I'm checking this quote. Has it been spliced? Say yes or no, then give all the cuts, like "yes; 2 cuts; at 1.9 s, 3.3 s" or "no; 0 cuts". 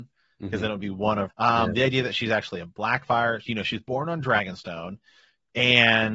yes; 1 cut; at 1.3 s